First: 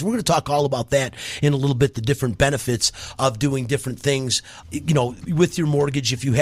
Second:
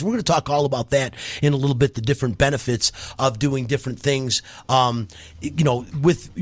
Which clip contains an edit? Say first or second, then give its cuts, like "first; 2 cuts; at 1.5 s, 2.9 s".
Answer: first; 2 cuts; at 4.6 s, 5.2 s